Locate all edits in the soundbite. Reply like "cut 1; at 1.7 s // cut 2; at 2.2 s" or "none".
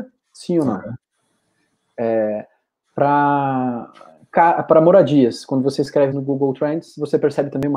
cut 1; at 6.1 s